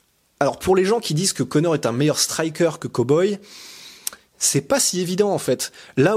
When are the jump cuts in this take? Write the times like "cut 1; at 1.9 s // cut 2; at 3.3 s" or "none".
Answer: none